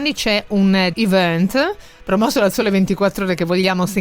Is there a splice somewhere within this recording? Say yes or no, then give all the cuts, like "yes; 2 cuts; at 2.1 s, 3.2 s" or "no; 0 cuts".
yes; 1 cut; at 0.9 s